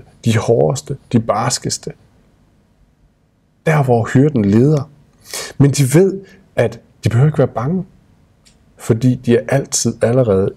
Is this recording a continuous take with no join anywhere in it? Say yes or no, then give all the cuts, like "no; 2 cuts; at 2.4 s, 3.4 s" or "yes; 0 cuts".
yes; 0 cuts